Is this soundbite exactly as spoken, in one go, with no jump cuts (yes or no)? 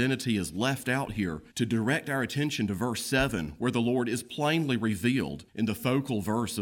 no